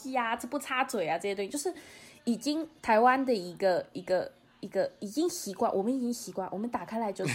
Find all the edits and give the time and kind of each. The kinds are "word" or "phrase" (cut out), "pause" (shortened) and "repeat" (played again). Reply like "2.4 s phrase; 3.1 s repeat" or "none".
none